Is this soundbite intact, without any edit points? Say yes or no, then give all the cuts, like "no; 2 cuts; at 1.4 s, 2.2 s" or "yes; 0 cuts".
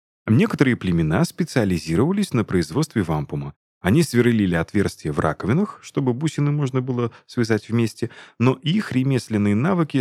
yes; 0 cuts